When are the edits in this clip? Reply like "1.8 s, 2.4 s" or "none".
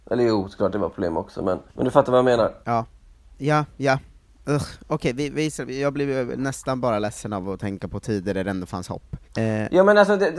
1.7 s, 2.6 s, 9.2 s